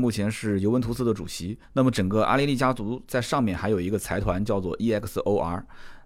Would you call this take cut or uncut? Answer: cut